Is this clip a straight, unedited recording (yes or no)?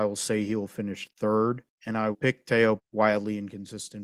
no